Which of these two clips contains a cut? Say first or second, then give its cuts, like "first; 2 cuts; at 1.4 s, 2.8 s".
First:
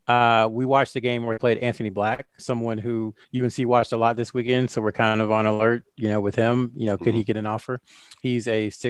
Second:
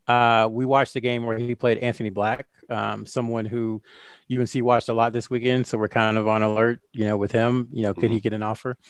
first; 3 cuts; at 1.4 s, 2.4 s, 3.2 s